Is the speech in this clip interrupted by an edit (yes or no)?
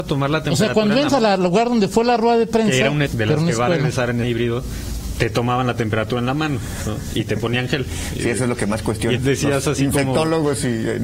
yes